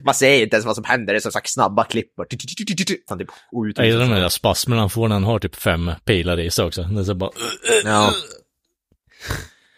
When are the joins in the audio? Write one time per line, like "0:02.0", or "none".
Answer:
0:03.1